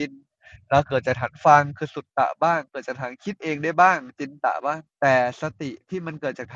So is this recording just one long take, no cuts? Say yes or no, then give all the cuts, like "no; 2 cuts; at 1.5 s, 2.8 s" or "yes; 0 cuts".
no; 1 cut; at 4.9 s